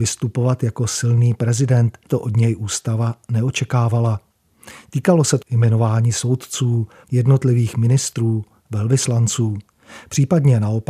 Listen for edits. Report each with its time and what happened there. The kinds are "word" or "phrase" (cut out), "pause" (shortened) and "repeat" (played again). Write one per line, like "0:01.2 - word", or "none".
0:02.1 - word
0:05.4 - word
0:07.0 - word